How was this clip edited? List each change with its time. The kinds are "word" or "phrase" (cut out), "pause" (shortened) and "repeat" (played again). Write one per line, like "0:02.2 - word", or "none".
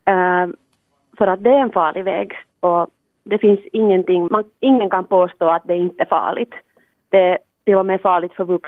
0:04.3 - word

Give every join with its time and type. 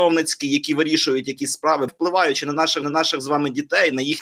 0:01.9 - word
0:02.8 - repeat

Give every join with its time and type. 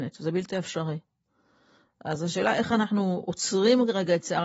none

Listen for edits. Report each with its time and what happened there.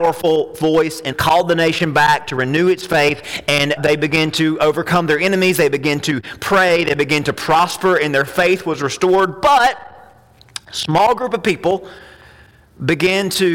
0:01.1 - word
0:03.8 - word

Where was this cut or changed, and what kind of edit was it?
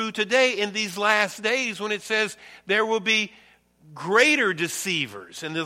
none

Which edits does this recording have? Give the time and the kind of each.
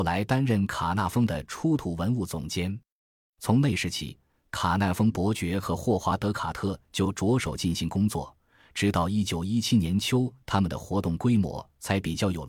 none

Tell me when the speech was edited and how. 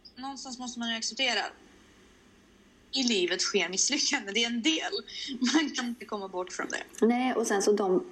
none

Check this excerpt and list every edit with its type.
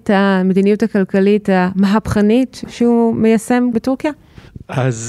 0:03.7 - word

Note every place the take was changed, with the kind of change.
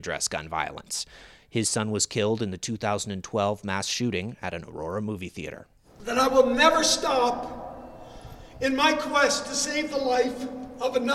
none

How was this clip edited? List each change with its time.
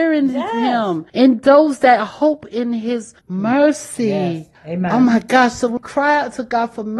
0:01.1 - pause
0:03.2 - pause
0:04.5 - pause
0:05.8 - word

